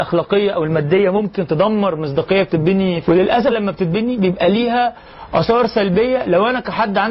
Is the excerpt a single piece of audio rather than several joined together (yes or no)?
no